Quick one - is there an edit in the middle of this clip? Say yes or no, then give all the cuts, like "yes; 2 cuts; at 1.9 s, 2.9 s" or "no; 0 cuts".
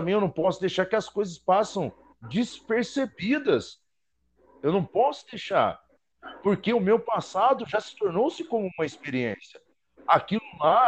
no; 0 cuts